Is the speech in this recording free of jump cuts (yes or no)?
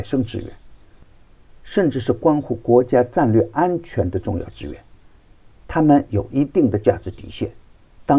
yes